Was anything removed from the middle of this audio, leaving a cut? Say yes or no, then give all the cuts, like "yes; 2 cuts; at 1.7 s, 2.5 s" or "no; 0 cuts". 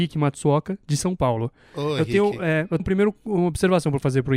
yes; 1 cut; at 2.8 s